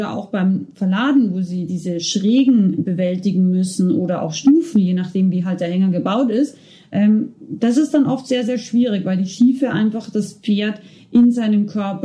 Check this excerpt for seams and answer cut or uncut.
uncut